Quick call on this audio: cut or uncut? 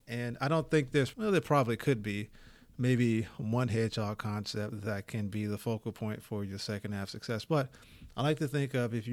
cut